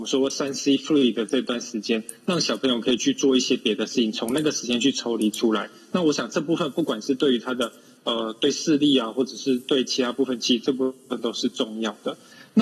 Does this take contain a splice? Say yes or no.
no